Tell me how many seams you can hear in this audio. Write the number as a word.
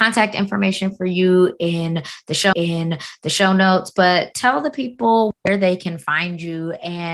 one